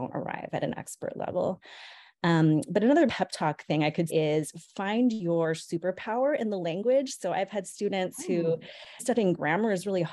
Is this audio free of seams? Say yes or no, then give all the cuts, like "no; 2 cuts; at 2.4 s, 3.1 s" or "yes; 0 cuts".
no; 3 cuts; at 3.1 s, 4.1 s, 9.0 s